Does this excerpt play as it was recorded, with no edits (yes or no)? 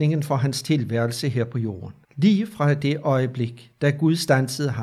no